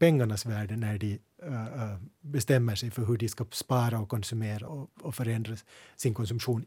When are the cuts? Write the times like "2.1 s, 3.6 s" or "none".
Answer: 4.7 s